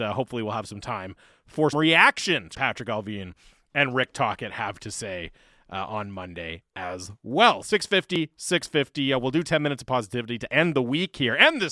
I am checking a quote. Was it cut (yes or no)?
yes